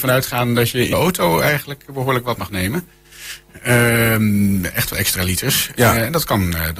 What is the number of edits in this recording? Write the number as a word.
three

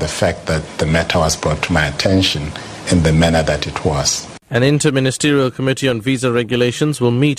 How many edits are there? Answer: one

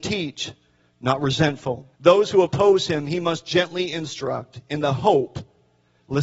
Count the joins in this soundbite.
one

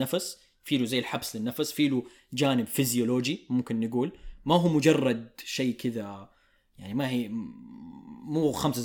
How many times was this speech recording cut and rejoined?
zero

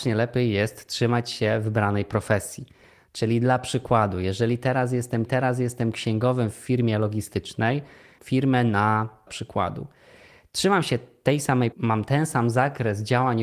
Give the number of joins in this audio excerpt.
four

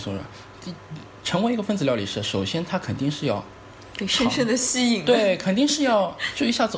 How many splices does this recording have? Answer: zero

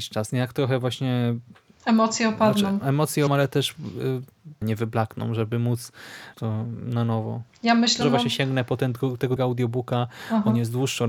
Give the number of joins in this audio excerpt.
five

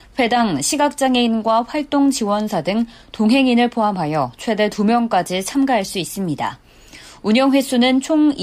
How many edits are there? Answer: zero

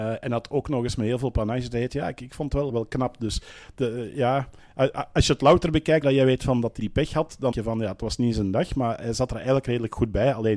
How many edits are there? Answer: four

